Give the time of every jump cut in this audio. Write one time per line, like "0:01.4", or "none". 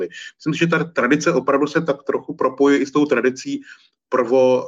none